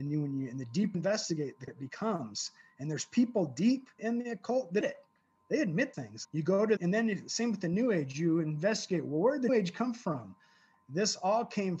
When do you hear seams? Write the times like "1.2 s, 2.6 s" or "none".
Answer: 0.9 s, 1.7 s, 4.0 s, 4.8 s, 5.9 s, 6.2 s, 6.8 s, 9.5 s